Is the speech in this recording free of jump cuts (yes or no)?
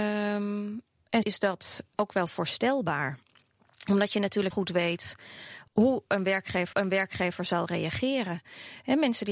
no